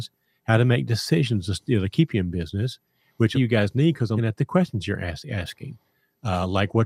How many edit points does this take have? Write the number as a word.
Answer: two